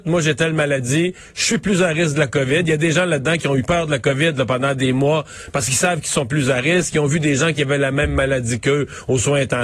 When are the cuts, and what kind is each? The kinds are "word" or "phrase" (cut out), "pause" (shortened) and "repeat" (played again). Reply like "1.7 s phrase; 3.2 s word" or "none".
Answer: none